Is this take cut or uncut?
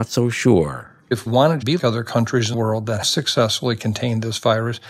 cut